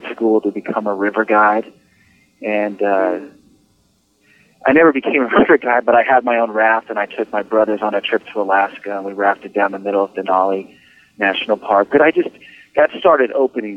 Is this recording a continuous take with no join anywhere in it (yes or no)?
yes